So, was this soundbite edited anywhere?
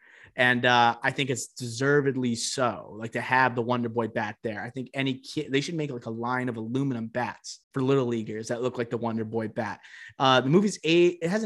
yes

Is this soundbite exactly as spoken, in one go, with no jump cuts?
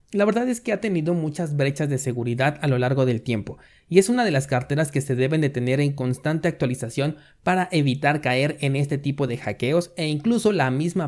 yes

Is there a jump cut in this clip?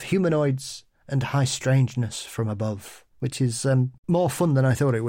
yes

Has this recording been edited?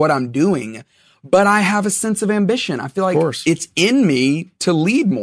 no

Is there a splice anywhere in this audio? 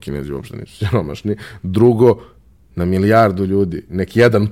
no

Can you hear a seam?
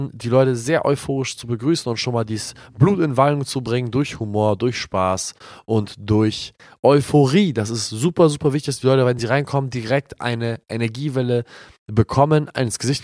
no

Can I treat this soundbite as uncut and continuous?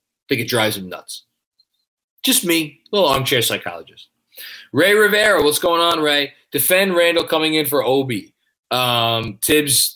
yes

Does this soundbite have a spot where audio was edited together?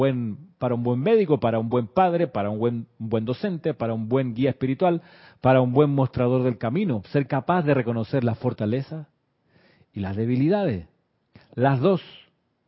no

